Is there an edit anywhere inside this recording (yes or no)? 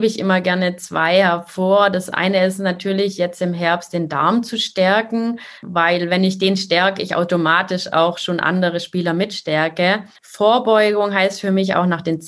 yes